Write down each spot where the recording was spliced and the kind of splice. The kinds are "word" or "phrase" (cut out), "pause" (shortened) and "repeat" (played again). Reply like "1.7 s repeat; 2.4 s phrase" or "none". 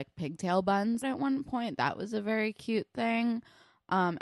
1.0 s phrase